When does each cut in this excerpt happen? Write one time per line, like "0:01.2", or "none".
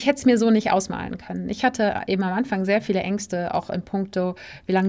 none